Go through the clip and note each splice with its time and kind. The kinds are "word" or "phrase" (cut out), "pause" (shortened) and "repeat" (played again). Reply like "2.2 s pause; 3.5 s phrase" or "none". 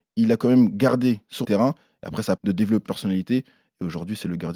1.4 s word; 2.4 s word; 2.8 s word